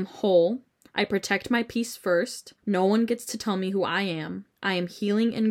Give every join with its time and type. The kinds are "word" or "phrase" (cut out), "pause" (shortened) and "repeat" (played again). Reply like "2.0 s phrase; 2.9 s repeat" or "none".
2.6 s pause